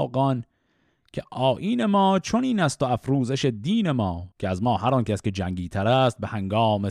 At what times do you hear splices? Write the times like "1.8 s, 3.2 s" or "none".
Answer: 4.3 s